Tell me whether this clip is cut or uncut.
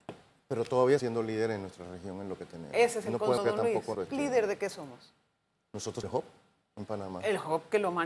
cut